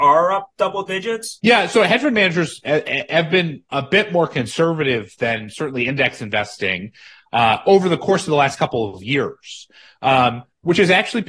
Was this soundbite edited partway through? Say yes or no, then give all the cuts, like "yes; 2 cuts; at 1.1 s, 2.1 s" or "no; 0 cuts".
no; 0 cuts